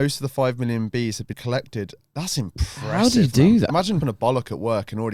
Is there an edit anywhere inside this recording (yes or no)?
yes